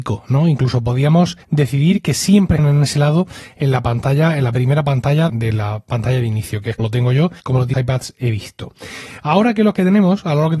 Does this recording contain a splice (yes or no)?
yes